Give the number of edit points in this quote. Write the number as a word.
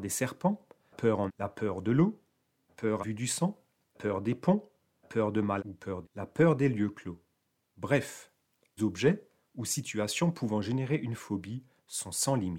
nine